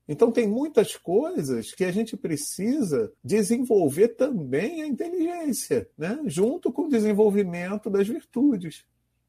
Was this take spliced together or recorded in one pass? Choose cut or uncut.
cut